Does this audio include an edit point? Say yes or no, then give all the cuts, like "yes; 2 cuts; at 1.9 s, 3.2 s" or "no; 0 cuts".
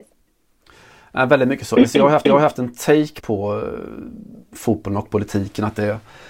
yes; 2 cuts; at 2.3 s, 3.2 s